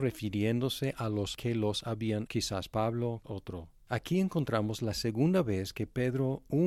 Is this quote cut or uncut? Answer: cut